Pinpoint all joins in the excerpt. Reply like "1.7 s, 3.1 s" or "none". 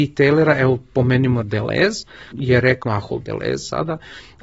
1.4 s, 2.3 s, 2.8 s

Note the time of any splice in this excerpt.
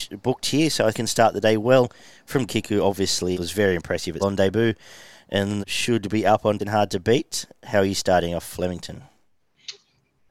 0.9 s, 2.5 s, 3.3 s, 4.2 s, 5.6 s, 6.6 s

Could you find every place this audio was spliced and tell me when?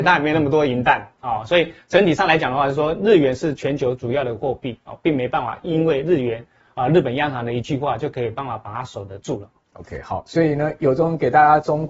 none

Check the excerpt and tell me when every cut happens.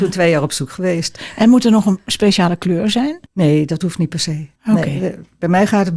3.3 s, 4.6 s

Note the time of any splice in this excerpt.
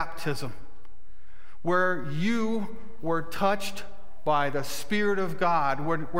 none

